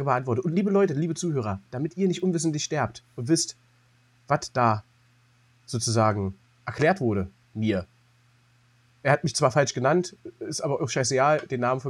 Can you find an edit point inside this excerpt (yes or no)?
yes